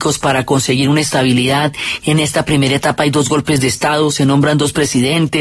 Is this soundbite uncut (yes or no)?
yes